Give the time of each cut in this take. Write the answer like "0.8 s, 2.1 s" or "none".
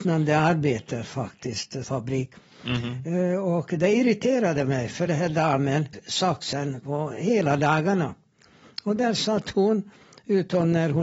1.8 s, 5.1 s, 5.9 s